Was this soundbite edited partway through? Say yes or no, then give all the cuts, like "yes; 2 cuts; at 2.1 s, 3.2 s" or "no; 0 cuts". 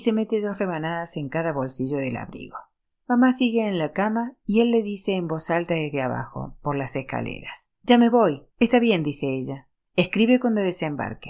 yes; 3 cuts; at 2.8 s, 7.7 s, 8.5 s